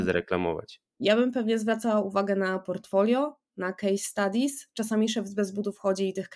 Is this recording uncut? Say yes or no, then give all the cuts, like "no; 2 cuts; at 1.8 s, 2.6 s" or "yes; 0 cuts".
yes; 0 cuts